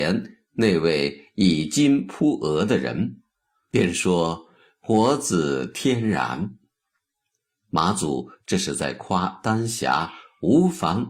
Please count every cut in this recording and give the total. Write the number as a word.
zero